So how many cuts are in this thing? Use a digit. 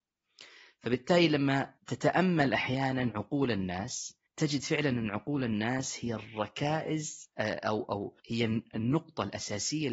3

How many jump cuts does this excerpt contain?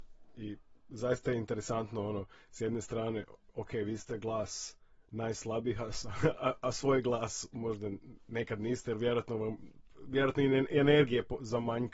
0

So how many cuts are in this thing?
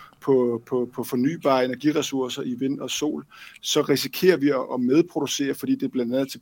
0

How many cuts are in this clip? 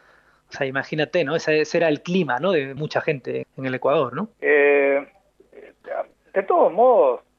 3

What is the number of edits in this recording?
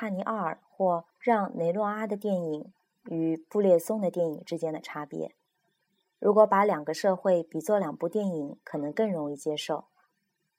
1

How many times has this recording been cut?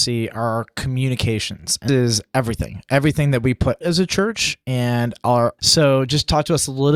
3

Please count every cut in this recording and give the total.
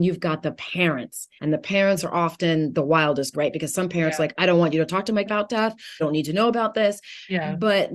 4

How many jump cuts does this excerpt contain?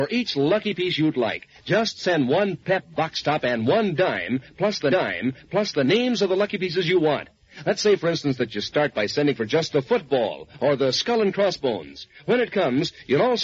1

